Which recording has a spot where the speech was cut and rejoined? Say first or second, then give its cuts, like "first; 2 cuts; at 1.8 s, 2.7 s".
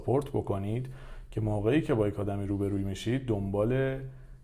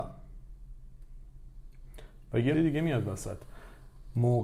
second; 1 cut; at 2.5 s